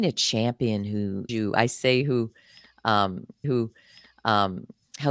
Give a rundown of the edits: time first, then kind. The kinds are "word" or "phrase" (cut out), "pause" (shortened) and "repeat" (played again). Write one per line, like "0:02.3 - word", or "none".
0:01.3 - word
0:03.4 - repeat